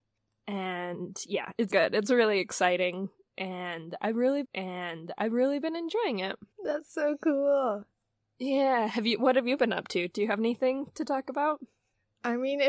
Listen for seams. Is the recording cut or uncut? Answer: cut